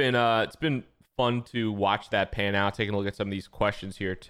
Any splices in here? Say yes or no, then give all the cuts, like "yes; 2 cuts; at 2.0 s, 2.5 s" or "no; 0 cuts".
no; 0 cuts